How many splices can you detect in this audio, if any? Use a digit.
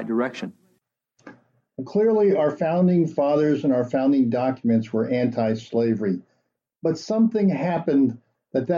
0